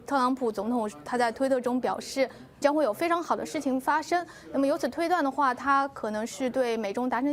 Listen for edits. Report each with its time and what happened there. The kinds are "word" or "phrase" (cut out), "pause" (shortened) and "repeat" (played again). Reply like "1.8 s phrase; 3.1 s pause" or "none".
2.6 s word